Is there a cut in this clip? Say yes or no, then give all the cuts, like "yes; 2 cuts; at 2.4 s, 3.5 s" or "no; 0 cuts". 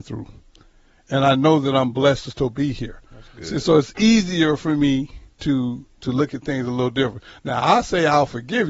yes; 1 cut; at 5.3 s